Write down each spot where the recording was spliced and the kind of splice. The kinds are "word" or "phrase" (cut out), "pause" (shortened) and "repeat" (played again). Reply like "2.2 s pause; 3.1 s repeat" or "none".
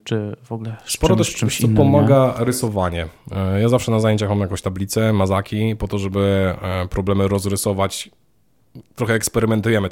none